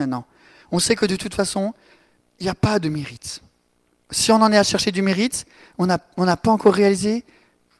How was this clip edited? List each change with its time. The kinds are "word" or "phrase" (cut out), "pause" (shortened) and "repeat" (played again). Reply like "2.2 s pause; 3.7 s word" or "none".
none

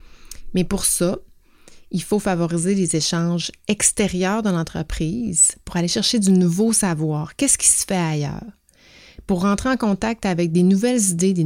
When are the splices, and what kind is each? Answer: none

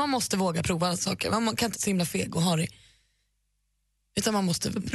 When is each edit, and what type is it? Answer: 1.7 s word

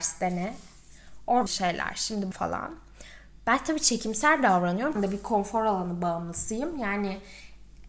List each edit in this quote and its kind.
1.5 s word; 2.3 s word; 5.0 s phrase

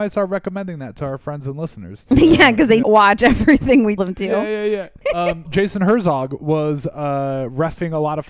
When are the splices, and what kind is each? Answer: 2.8 s word; 4.0 s word; 5.0 s word; 5.5 s word

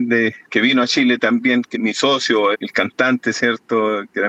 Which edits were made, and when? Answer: 1.7 s word; 2.5 s word

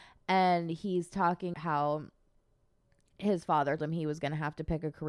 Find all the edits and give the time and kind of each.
1.5 s word; 3.8 s word

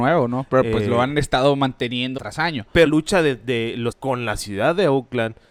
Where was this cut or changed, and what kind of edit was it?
2.2 s word; 2.9 s word; 3.9 s word

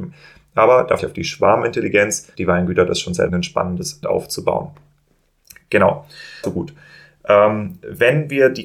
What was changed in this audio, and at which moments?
1.0 s word; 2.4 s word; 3.3 s word; 4.0 s word; 6.4 s word

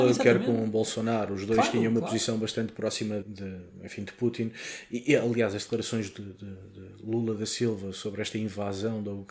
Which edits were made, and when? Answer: 3.2 s word

